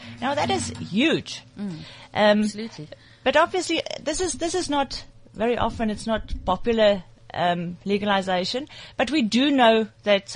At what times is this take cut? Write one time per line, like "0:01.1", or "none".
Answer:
none